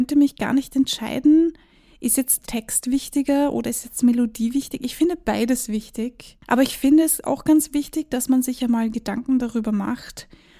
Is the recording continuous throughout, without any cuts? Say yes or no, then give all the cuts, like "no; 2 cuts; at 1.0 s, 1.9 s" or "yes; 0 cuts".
no; 1 cut; at 6.4 s